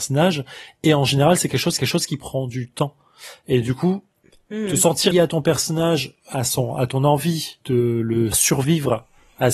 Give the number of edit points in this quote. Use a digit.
4